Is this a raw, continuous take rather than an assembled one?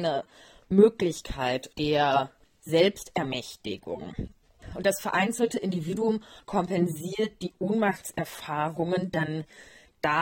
yes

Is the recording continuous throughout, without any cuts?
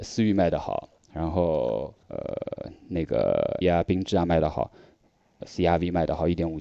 no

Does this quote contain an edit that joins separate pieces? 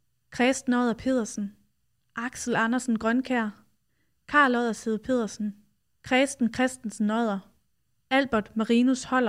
no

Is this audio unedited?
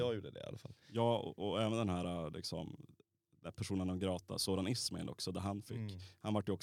yes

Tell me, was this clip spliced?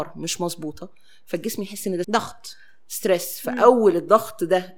yes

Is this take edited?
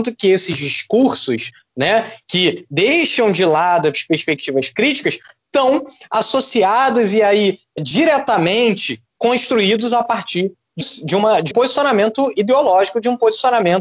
yes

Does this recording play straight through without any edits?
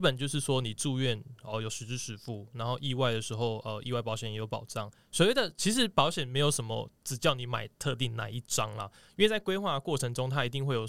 yes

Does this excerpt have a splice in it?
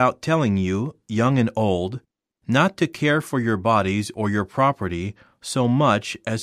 no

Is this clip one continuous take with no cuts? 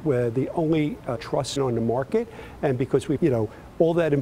no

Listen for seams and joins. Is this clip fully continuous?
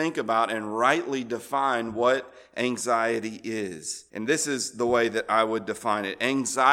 no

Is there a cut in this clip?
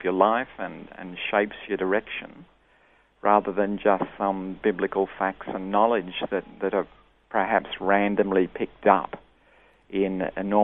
no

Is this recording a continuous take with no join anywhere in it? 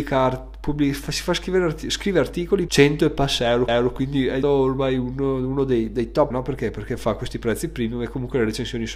no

